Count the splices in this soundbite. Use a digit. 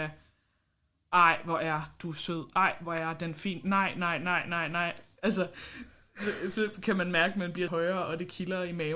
1